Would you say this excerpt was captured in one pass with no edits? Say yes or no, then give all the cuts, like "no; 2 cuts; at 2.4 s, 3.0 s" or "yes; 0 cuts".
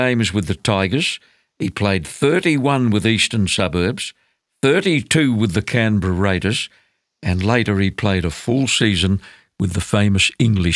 yes; 0 cuts